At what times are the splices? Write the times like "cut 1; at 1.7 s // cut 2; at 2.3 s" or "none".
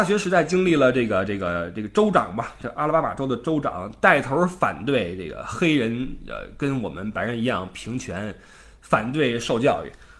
none

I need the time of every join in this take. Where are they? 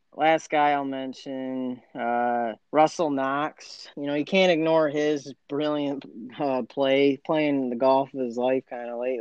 cut 1; at 2.6 s // cut 2; at 3.9 s

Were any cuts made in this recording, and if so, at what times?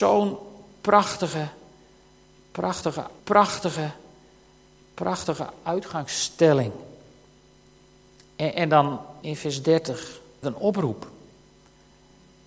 cut 1; at 3.2 s // cut 2; at 9.2 s // cut 3; at 10.4 s

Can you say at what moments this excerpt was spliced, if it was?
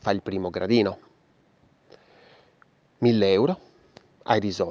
none

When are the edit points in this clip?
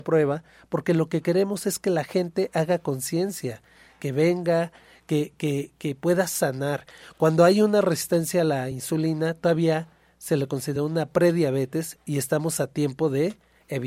none

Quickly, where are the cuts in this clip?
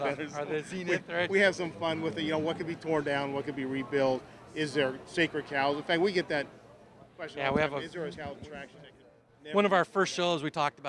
cut 1; at 8.1 s

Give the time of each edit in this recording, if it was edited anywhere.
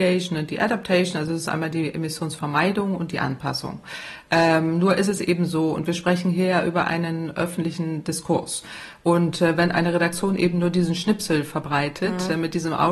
none

